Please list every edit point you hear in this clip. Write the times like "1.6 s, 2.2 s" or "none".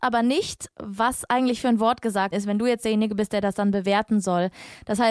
2.3 s